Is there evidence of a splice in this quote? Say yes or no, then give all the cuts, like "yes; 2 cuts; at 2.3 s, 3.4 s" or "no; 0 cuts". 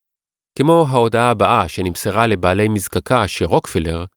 no; 0 cuts